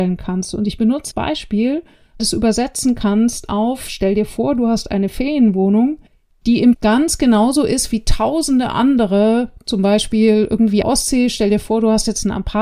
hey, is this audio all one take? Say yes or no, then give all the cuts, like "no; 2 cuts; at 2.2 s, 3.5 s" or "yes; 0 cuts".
no; 5 cuts; at 1.1 s, 2.2 s, 6.1 s, 6.7 s, 10.8 s